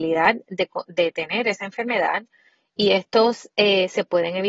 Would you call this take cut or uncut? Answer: uncut